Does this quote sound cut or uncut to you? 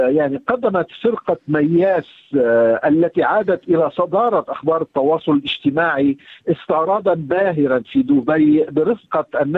uncut